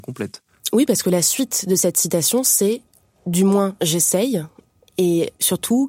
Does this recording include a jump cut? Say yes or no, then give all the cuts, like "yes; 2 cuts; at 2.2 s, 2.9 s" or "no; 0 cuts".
no; 0 cuts